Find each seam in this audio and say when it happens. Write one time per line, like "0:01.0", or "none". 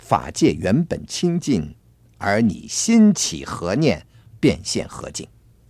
none

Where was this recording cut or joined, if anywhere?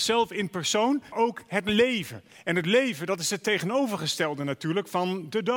0:01.1

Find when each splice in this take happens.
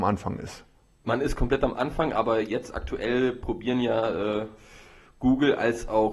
none

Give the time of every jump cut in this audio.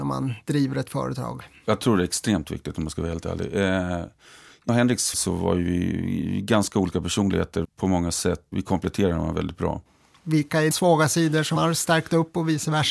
0:04.7
0:05.1
0:07.6
0:08.5
0:10.7
0:11.6

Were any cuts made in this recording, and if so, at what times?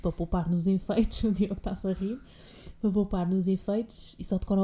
none

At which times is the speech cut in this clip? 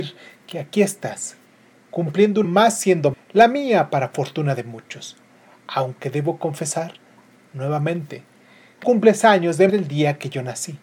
0:02.4
0:03.1
0:08.8
0:09.7

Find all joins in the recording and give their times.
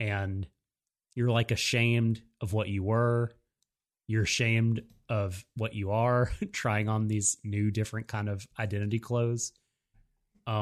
none

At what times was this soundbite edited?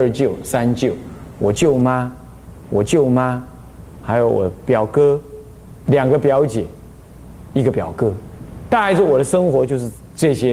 0:02.6
0:05.9

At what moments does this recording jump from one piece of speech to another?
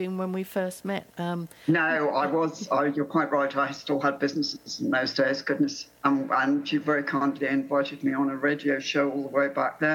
0:01.1
0:06.0

